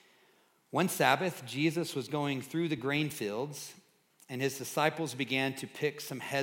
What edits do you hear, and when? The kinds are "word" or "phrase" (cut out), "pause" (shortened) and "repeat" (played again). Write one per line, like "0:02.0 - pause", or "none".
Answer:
none